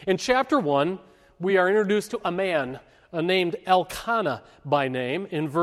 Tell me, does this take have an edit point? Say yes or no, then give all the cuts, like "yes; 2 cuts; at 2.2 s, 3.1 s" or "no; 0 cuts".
no; 0 cuts